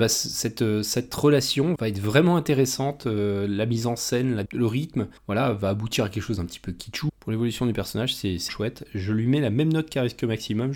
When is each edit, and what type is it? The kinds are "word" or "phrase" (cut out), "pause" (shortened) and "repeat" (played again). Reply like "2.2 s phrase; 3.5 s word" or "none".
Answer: 1.8 s word; 4.5 s phrase; 5.2 s pause; 7.1 s word; 8.5 s word